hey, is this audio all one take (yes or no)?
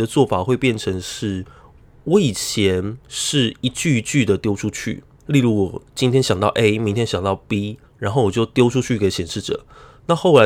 no